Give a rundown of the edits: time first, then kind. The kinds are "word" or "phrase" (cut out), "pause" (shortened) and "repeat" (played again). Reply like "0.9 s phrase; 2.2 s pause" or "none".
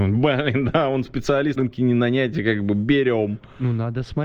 1.6 s word

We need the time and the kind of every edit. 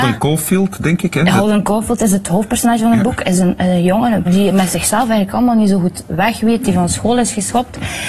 4.3 s phrase

